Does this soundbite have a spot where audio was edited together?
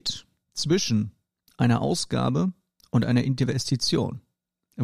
no; 0 cuts

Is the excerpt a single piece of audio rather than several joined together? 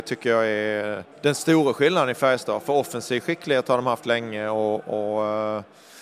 no; 1 cut; at 1.1 s

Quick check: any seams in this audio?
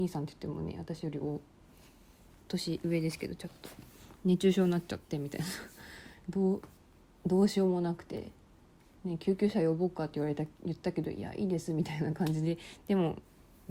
no; 0 cuts

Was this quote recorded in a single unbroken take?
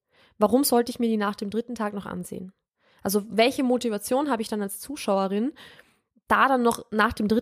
yes; 0 cuts

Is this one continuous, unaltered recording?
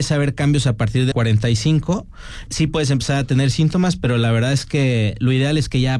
no; 2 cuts; at 1.1 s, 2.5 s

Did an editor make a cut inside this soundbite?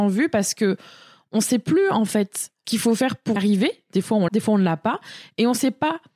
yes; 3 cuts; at 2.6 s, 3.4 s, 4.3 s

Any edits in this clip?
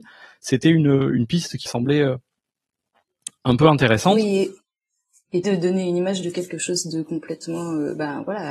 yes; 2 cuts; at 1.7 s, 5.4 s

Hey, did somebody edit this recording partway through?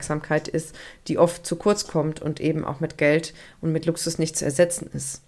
no; 0 cuts

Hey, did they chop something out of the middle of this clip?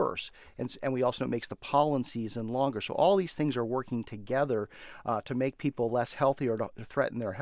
no; 0 cuts

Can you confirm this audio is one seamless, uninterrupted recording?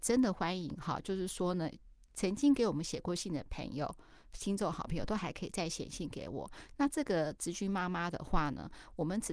yes; 0 cuts

